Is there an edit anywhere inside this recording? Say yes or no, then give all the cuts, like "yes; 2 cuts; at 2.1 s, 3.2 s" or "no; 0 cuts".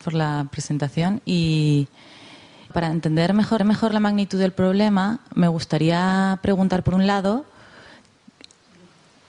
yes; 2 cuts; at 2.7 s, 3.6 s